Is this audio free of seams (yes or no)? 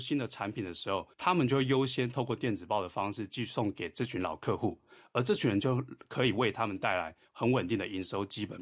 no